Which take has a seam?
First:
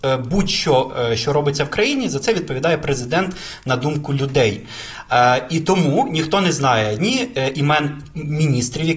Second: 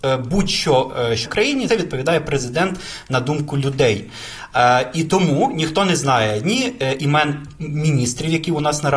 second; 2 cuts; at 1.3 s, 1.7 s

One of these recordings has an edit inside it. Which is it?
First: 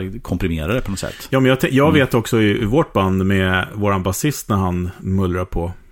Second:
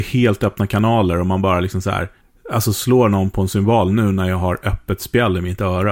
second; 1 cut; at 2.2 s

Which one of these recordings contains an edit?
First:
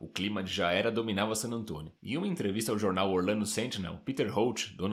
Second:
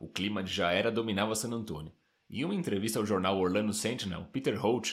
first; 1 cut; at 2.0 s

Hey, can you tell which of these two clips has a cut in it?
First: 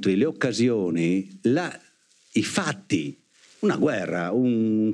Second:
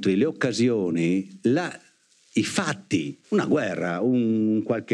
second; 1 cut; at 3.2 s

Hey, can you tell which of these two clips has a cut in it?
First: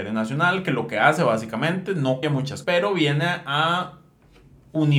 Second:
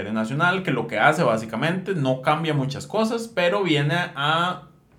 first; 2 cuts; at 2.2 s, 2.6 s

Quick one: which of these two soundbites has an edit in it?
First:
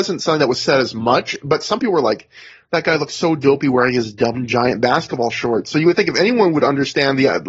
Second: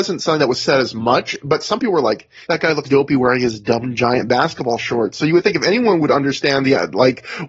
second; 2 cuts; at 2.4 s, 2.8 s

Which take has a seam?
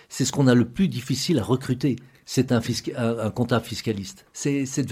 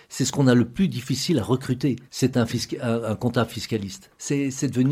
second; 1 cut; at 2.0 s

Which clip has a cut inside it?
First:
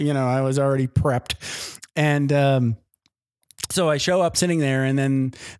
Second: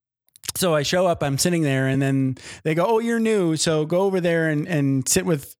first; 1 cut; at 4.3 s

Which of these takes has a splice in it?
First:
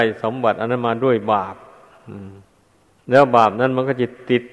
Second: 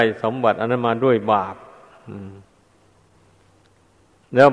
first; 1 cut; at 2.8 s

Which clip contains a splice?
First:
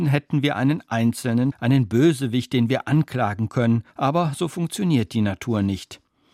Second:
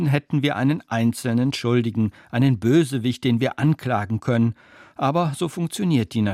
first; 2 cuts; at 1.5 s, 3.9 s

